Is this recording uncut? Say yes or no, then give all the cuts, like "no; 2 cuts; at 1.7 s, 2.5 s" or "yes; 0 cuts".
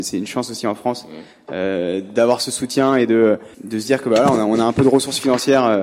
no; 1 cut; at 3.5 s